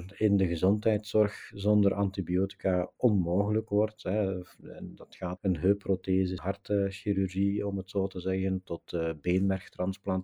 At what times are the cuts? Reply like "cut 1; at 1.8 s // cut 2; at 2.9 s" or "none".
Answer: cut 1; at 5.4 s // cut 2; at 6.4 s

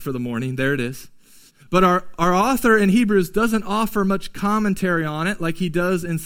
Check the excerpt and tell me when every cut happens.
cut 1; at 1.5 s

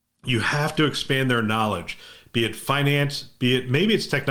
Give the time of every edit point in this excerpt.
none

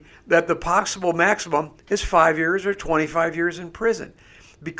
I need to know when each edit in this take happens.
none

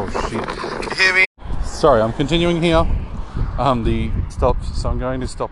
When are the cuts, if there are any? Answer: cut 1; at 4.3 s

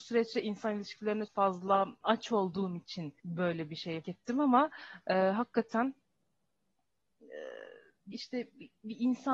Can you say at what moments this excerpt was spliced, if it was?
cut 1; at 1.3 s // cut 2; at 2.0 s // cut 3; at 3.2 s // cut 4; at 4.0 s // cut 5; at 8.1 s

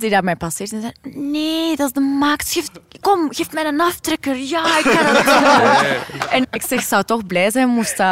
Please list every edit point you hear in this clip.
cut 1; at 6.4 s

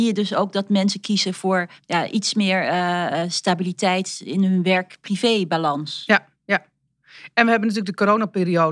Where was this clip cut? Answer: cut 1; at 1.8 s // cut 2; at 6.3 s

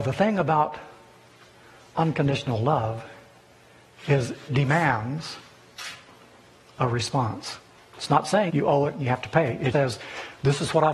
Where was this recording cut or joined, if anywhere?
cut 1; at 4.5 s // cut 2; at 8.5 s // cut 3; at 9.7 s

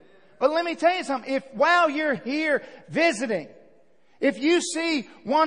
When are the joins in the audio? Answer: none

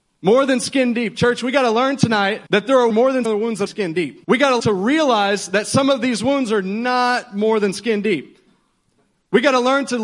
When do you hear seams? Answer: cut 1; at 2.5 s // cut 2; at 2.9 s // cut 3; at 3.2 s // cut 4; at 3.7 s // cut 5; at 4.2 s // cut 6; at 4.6 s

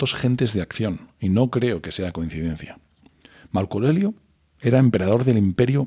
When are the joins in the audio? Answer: none

